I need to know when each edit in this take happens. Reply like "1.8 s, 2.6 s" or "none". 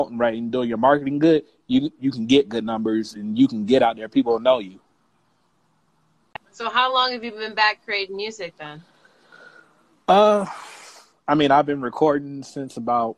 none